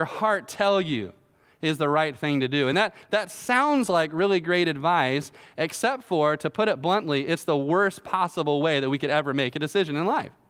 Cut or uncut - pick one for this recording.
uncut